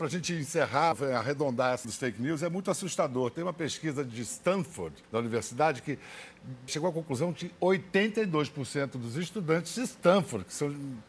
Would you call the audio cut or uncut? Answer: cut